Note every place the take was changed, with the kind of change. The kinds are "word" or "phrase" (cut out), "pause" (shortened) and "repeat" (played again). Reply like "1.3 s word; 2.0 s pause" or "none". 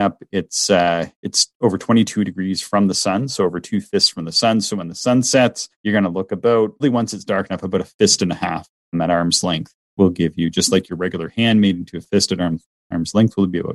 5.7 s pause; 6.8 s word; 8.9 s word